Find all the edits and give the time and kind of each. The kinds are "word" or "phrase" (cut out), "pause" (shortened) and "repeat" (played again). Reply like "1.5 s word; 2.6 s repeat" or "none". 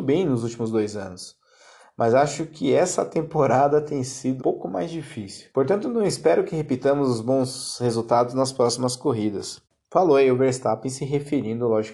4.4 s word; 5.5 s pause